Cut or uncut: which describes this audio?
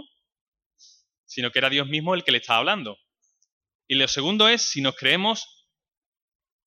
uncut